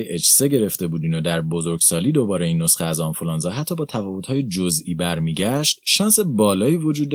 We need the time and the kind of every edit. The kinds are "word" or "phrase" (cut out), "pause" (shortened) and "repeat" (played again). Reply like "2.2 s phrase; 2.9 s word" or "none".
none